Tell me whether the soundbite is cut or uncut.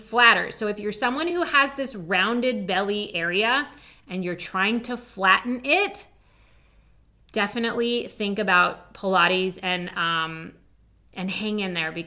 uncut